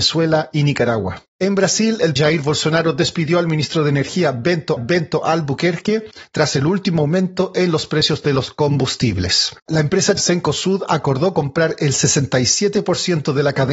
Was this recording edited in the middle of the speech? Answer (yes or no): yes